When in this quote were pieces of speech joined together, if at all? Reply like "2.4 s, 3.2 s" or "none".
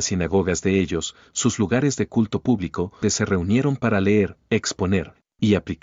3.0 s